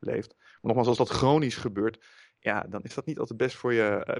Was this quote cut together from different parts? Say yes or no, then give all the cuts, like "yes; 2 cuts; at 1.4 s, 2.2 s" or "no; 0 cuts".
no; 0 cuts